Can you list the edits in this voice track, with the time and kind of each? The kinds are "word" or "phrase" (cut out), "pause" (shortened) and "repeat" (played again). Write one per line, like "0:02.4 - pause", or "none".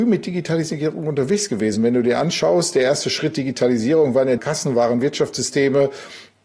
0:04.4 - word